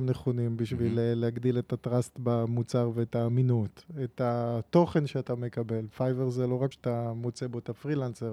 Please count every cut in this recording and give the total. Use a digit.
1